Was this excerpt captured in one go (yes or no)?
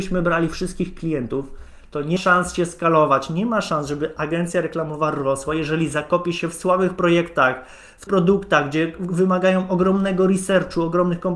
no